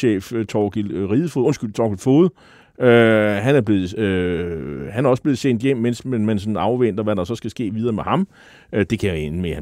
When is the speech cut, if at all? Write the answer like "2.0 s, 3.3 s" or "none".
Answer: none